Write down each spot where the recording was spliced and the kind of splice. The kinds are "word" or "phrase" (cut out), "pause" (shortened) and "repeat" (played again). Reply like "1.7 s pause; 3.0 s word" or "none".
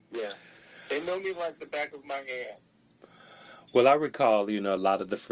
none